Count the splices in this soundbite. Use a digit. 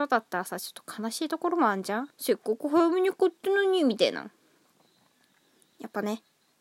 1